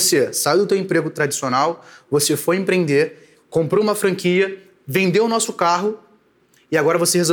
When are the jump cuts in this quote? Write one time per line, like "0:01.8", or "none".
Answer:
none